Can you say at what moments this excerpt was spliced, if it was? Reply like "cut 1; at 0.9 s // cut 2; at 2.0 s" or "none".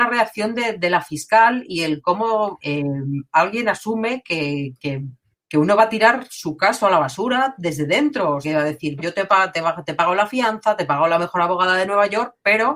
cut 1; at 2.6 s // cut 2; at 5.3 s // cut 3; at 8.4 s // cut 4; at 9.0 s